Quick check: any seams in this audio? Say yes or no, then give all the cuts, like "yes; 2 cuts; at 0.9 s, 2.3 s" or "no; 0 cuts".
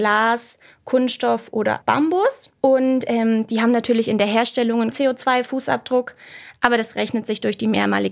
yes; 3 cuts; at 1.8 s, 2.6 s, 4.9 s